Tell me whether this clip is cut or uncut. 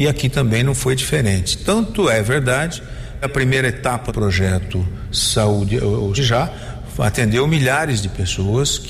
cut